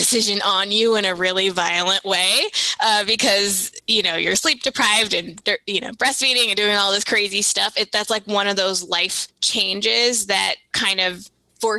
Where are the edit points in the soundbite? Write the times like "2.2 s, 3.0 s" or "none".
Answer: 10.7 s